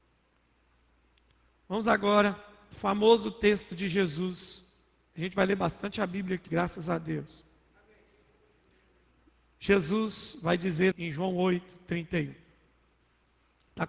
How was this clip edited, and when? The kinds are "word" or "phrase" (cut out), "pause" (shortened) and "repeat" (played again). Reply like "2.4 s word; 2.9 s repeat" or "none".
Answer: 2.7 s word; 6.5 s word; 10.9 s word

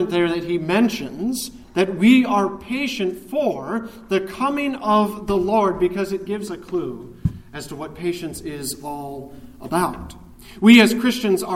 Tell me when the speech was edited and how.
1.6 s pause; 6.5 s word

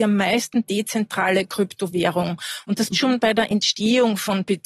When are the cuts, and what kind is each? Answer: 2.9 s word

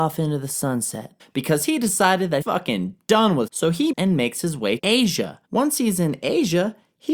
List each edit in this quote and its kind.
1.2 s pause; 2.4 s word; 3.5 s word; 3.9 s word; 4.8 s word; 5.4 s pause

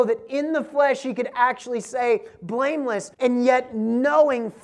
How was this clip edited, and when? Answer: 3.1 s pause

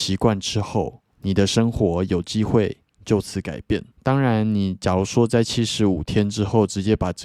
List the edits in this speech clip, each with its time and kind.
1.1 s pause; 3.9 s pause

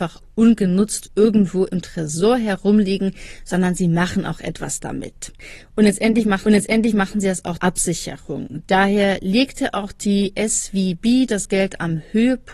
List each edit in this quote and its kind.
6.4 s repeat; 7.6 s word

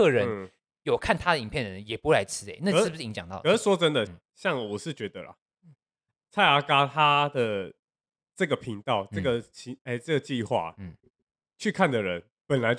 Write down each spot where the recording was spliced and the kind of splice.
4.1 s word

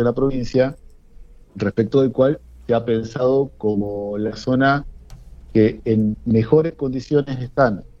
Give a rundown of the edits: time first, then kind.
none

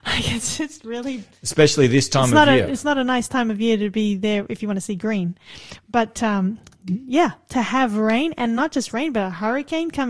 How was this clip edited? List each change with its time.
none

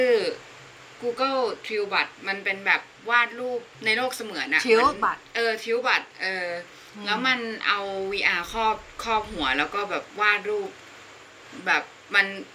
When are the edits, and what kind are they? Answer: 2.2 s pause; 3.7 s pause; 6.1 s pause

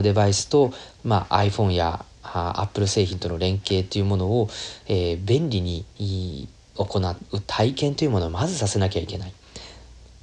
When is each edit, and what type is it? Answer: 5.9 s pause

